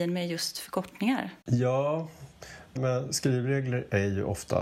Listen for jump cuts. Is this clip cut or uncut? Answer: cut